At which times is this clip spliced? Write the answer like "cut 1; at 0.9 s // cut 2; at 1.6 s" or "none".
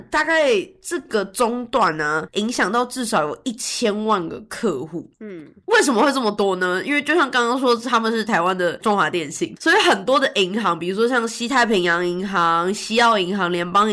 cut 1; at 2.3 s